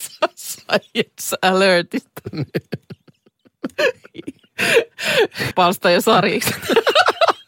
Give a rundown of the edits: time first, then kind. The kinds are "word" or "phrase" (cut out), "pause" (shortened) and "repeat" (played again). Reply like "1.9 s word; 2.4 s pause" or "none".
5.5 s word